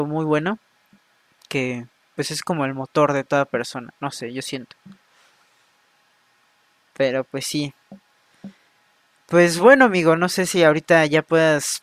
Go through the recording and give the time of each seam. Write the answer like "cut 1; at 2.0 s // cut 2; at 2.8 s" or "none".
none